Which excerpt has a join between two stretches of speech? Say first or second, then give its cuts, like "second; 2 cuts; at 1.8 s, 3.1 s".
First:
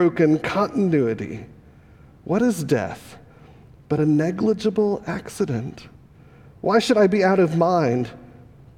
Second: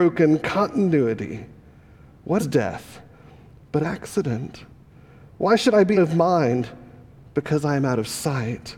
second; 3 cuts; at 2.4 s, 3.8 s, 5.9 s